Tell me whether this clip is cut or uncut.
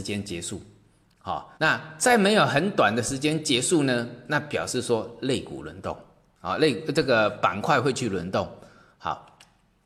cut